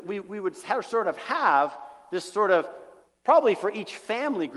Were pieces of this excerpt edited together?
no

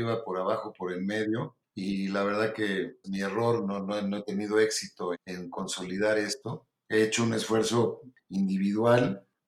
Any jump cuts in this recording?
yes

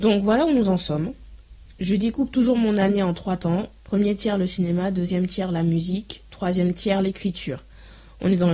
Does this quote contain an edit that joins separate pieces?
yes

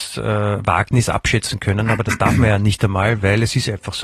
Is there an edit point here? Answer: no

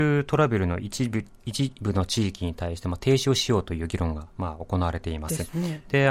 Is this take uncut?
no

